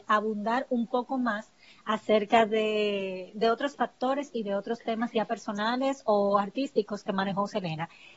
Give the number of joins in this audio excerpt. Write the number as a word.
zero